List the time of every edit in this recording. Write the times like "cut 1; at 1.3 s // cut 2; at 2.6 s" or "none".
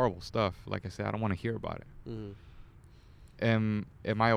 cut 1; at 3.3 s